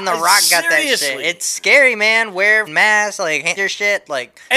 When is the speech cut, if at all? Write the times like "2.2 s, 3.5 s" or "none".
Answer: 2.7 s, 3.6 s